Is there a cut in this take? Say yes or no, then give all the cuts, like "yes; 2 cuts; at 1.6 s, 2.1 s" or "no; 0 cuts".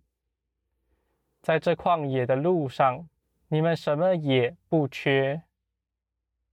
yes; 1 cut; at 3.2 s